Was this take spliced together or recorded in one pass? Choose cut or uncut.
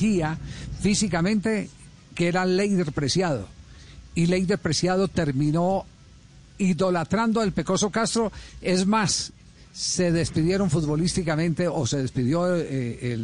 uncut